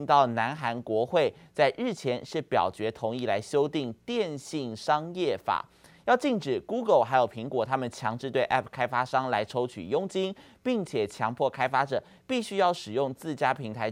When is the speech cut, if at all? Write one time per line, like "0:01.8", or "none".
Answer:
none